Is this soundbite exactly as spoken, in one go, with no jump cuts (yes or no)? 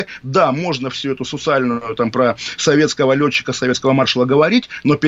yes